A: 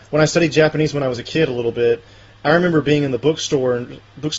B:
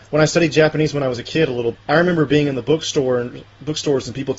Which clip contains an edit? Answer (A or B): B